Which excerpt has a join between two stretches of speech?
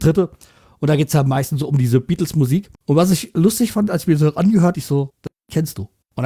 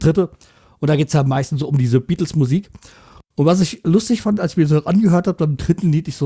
first; 2 cuts; at 2.7 s, 4.7 s

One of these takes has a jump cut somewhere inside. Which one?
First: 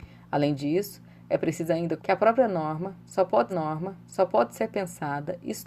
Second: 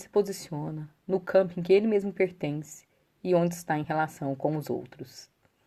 first; 2 cuts; at 2.0 s, 3.5 s

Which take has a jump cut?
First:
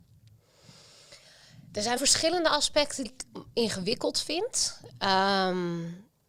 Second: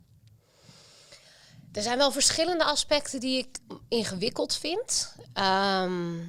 first; 2 cuts; at 2.0 s, 3.0 s

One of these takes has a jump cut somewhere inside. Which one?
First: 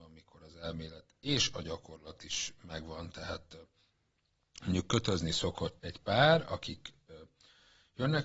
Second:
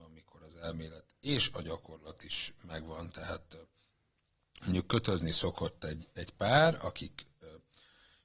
first; 1 cut; at 5.8 s

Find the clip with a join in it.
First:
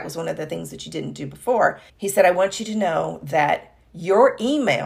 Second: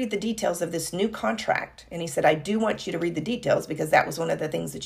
first; 1 cut; at 1.9 s

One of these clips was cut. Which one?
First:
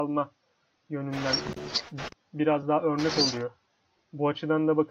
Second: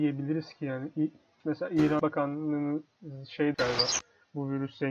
second; 3 cuts; at 1.4 s, 2.0 s, 3.5 s

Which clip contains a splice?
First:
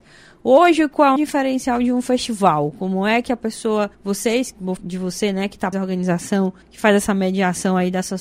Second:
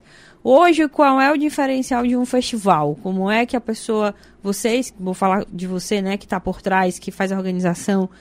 first; 5 cuts; at 1.2 s, 3.9 s, 4.8 s, 5.7 s, 6.6 s

